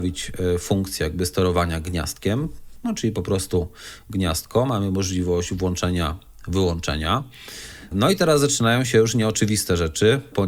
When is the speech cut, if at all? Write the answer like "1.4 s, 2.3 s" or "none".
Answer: none